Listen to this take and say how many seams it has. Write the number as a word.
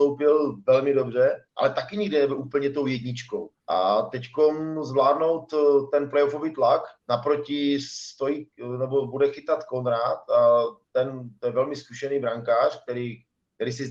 three